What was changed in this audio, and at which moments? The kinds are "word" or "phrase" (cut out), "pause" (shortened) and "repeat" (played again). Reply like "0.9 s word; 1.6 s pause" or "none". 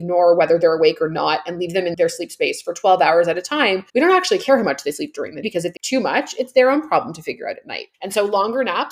3.9 s pause; 5.4 s word; 5.8 s word; 7.9 s pause